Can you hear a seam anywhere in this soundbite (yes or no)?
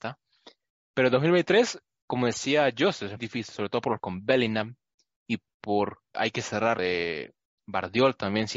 yes